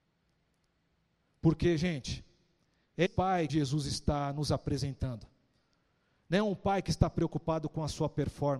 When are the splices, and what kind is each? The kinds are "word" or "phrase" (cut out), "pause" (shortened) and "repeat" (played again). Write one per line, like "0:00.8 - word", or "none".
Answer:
0:03.1 - word
0:03.5 - word